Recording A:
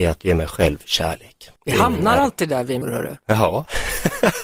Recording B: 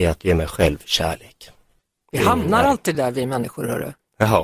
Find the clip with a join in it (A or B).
A